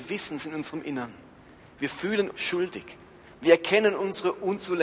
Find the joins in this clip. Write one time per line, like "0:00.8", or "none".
0:02.3